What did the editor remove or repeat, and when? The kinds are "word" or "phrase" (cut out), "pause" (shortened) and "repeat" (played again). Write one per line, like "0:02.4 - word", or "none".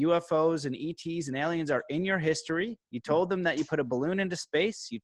0:02.8 - pause